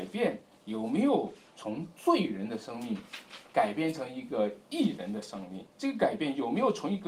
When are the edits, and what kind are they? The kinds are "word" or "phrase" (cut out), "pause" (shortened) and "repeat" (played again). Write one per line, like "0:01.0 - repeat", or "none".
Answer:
0:05.7 - pause